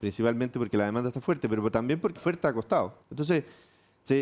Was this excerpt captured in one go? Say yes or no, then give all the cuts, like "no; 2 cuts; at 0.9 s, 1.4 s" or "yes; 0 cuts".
no; 2 cuts; at 2.1 s, 3.0 s